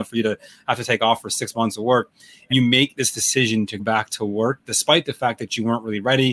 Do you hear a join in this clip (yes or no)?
yes